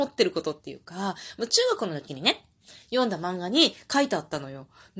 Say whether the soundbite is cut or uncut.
uncut